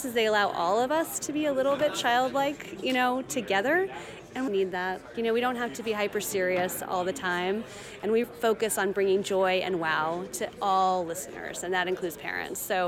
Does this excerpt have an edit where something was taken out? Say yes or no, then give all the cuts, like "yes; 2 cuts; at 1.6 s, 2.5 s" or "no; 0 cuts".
yes; 3 cuts; at 4.5 s, 5.1 s, 8.2 s